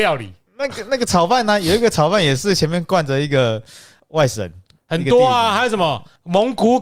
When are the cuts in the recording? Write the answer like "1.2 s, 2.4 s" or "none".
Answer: none